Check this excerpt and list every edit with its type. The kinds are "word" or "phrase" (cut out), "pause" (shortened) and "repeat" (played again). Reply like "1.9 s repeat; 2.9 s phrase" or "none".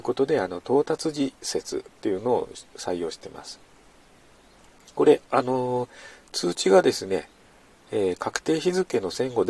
none